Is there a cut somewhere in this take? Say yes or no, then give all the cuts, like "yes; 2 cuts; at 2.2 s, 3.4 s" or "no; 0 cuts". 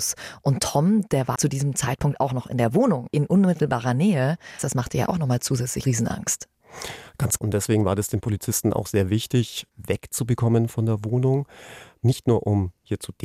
yes; 6 cuts; at 1.3 s, 3.1 s, 4.6 s, 5.8 s, 7.4 s, 9.7 s